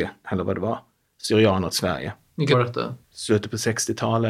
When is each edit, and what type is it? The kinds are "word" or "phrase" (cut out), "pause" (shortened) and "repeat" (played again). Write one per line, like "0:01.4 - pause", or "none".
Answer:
0:01.7 - word
0:02.5 - word
0:03.0 - pause